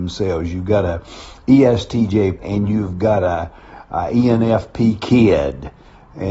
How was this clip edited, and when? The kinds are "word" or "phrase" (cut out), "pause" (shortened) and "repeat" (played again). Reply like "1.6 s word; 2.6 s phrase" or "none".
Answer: 2.4 s word